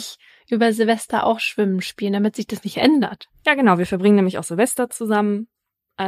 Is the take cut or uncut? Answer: uncut